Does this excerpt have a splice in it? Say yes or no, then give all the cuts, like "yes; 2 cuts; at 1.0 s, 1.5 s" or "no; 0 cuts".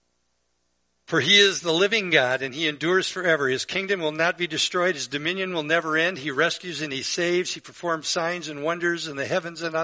no; 0 cuts